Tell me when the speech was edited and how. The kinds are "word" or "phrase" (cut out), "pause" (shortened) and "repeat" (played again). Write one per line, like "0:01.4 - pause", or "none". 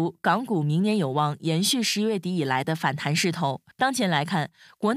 0:03.7 - pause